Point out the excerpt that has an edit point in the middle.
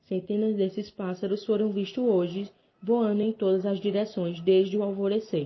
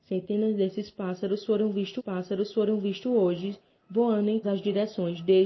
second; 2 cuts; at 2.0 s, 4.4 s

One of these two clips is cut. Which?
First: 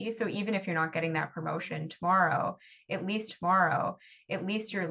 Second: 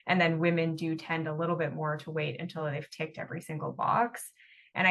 first; 1 cut; at 3.3 s

